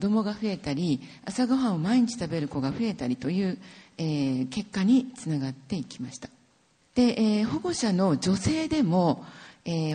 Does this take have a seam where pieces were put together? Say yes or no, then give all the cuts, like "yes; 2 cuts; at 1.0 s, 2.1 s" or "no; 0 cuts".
no; 0 cuts